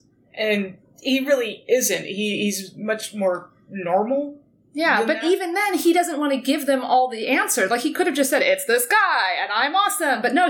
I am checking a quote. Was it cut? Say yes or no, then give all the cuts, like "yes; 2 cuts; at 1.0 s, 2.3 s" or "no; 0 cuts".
no; 0 cuts